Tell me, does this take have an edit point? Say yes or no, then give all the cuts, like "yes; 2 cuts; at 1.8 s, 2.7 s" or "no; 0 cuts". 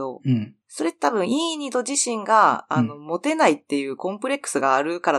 no; 0 cuts